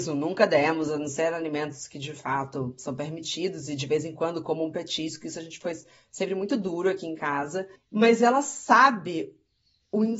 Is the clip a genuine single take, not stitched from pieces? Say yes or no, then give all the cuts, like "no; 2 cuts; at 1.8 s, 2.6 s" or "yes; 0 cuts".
no; 1 cut; at 7.7 s